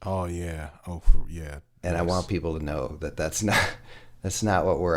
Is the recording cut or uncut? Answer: uncut